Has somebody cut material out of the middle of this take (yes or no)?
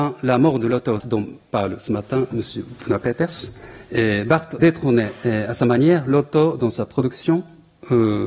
yes